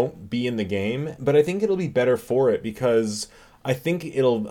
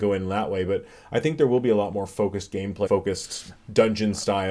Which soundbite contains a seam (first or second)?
second